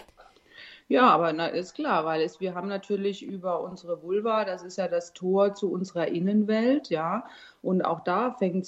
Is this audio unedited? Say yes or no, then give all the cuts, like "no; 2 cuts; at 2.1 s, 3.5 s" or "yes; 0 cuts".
yes; 0 cuts